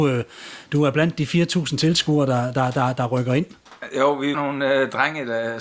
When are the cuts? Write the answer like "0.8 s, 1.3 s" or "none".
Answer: 4.3 s

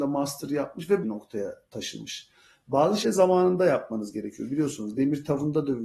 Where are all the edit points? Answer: 1.0 s, 3.0 s

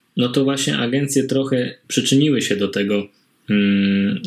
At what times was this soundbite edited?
1.8 s

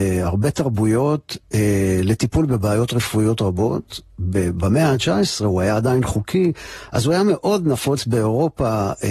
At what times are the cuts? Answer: none

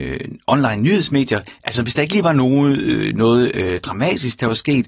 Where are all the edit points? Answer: none

